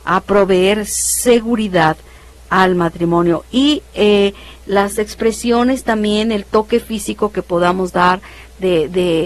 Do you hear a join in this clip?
no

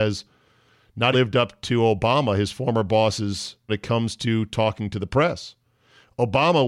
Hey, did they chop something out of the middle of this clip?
yes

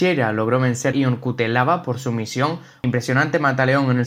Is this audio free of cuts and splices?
no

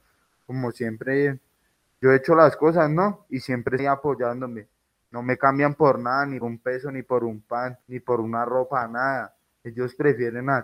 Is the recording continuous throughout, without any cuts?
no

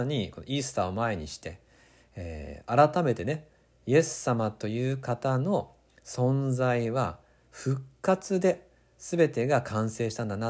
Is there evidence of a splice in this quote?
no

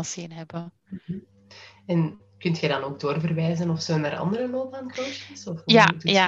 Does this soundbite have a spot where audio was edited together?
no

